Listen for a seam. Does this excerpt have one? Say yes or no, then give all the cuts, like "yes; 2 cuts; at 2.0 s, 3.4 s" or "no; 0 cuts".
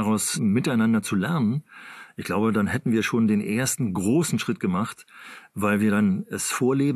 no; 0 cuts